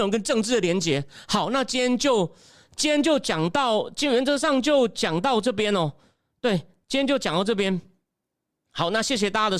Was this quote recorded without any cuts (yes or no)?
yes